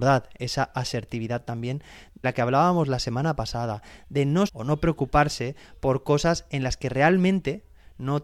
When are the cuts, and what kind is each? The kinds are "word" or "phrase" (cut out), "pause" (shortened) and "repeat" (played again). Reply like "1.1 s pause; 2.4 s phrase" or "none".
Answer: 2.2 s word; 4.5 s word